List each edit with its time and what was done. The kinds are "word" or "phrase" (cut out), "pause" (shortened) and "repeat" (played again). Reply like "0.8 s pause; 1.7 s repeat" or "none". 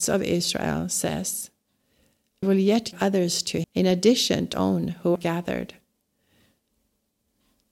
2.4 s word; 2.9 s word; 3.6 s word; 4.5 s word; 5.2 s word